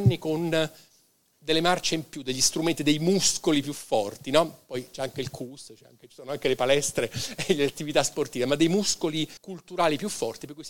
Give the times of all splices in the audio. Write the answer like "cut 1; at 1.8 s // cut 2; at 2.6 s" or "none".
cut 1; at 9.4 s